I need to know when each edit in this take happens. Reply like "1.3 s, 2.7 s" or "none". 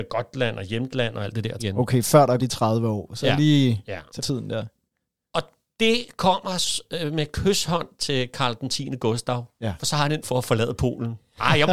1.6 s, 2.4 s, 4.2 s, 10.2 s